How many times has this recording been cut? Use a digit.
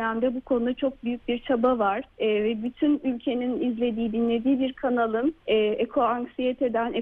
2